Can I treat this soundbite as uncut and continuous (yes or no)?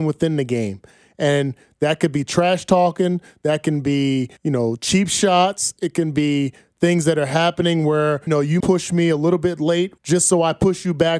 no